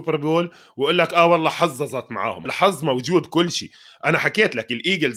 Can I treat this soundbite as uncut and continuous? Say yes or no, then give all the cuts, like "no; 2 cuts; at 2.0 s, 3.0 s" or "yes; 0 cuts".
no; 1 cut; at 2.4 s